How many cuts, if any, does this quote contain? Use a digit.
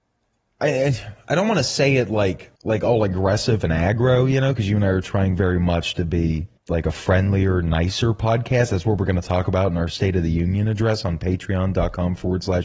2